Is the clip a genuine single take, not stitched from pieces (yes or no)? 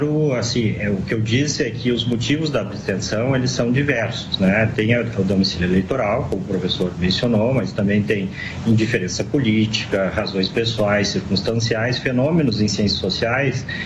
yes